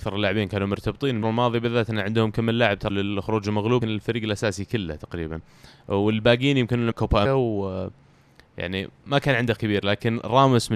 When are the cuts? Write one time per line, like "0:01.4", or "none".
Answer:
0:01.2
0:02.9
0:03.8
0:06.9
0:07.2
0:09.6